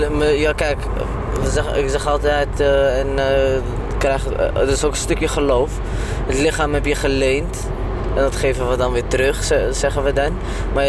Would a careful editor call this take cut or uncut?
uncut